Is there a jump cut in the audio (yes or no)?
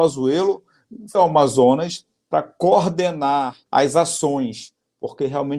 yes